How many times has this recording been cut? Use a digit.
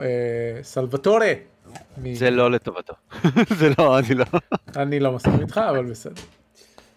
1